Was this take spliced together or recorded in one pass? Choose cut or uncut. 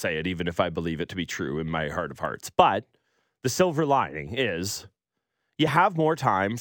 uncut